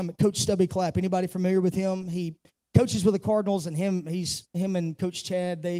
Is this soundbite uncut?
yes; 0 cuts

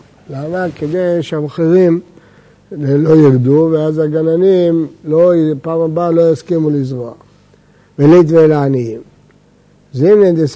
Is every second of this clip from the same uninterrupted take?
yes; 0 cuts

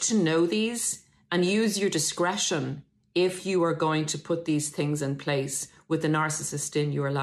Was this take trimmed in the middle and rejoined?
no; 0 cuts

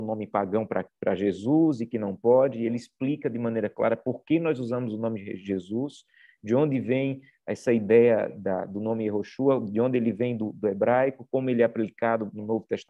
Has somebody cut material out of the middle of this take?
no; 0 cuts

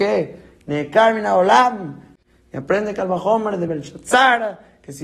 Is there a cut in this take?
no; 0 cuts

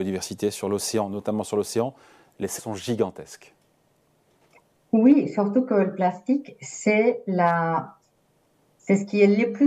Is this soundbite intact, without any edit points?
no; 1 cut; at 2.6 s

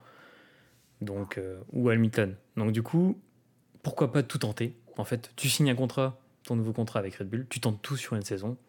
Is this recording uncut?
yes; 0 cuts

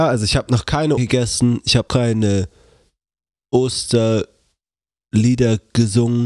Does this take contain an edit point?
yes; 2 cuts; at 1.0 s, 1.9 s

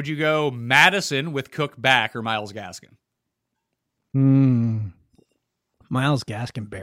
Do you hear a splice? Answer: no; 0 cuts

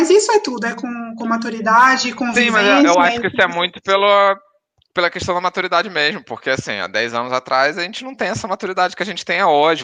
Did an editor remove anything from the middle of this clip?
no; 0 cuts

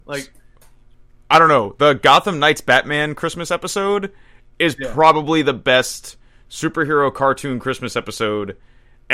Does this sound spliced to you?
no; 0 cuts

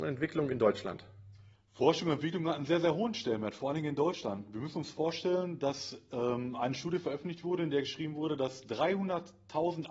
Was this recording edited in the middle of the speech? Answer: yes; 1 cut; at 1.5 s

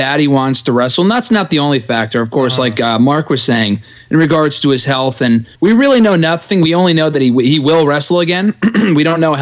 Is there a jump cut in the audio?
yes; 1 cut; at 5.6 s

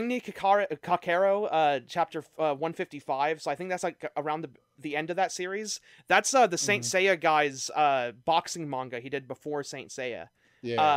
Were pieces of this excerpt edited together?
no; 0 cuts

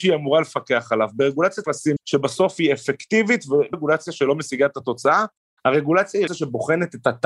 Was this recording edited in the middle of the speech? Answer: yes; 4 cuts; at 1.6 s, 2.0 s, 3.7 s, 6.3 s

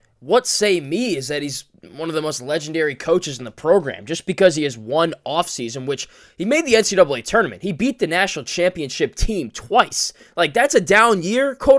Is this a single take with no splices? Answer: yes; 0 cuts

